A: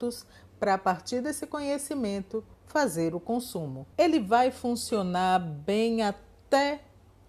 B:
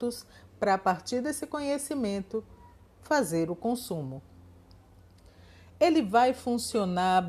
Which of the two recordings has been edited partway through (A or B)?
A